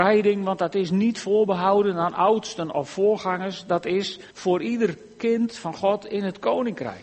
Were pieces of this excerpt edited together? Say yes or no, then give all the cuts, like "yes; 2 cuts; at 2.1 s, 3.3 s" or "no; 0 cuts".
yes; 1 cut; at 4.3 s